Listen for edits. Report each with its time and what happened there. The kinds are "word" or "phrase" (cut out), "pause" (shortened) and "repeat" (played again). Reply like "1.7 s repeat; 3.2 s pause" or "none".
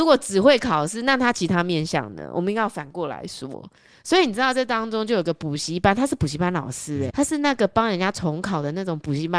7.1 s word